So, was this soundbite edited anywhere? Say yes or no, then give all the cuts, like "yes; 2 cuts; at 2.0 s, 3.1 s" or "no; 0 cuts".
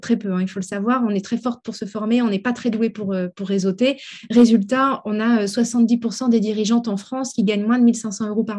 no; 0 cuts